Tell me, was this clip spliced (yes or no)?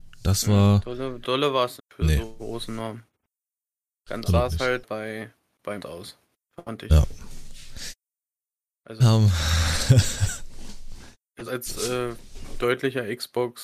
yes